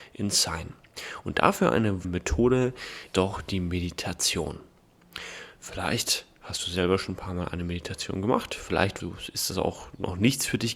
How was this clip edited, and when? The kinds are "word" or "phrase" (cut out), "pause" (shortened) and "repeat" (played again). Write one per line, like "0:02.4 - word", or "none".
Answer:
0:02.0 - word
0:03.1 - word
0:09.0 - word